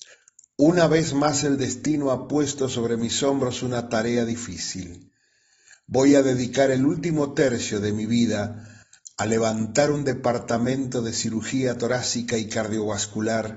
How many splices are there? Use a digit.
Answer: 0